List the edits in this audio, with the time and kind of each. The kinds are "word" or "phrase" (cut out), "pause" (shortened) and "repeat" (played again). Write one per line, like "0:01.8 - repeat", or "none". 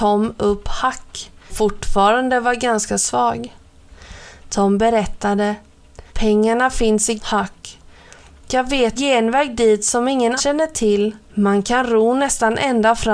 0:01.5 - word
0:06.1 - pause
0:07.2 - word
0:09.0 - word
0:10.4 - word
0:11.2 - pause